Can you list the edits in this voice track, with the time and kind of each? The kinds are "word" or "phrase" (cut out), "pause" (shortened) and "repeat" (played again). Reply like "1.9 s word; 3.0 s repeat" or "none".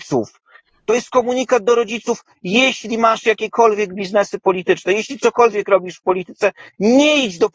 none